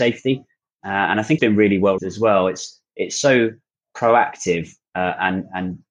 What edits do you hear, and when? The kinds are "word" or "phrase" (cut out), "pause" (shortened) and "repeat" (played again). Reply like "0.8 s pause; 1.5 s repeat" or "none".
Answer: 1.4 s word; 2.0 s word